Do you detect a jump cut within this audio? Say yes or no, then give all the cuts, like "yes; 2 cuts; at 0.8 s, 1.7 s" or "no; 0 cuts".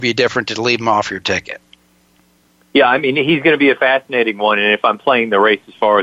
no; 0 cuts